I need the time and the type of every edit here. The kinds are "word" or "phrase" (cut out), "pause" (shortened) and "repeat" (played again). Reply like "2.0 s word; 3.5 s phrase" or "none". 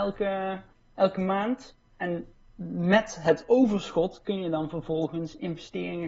1.8 s pause